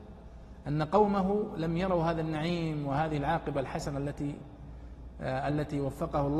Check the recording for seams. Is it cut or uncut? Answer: uncut